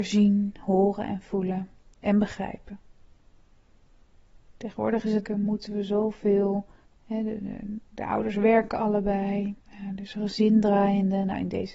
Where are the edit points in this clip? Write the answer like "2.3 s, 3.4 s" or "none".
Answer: 5.2 s, 6.8 s, 9.6 s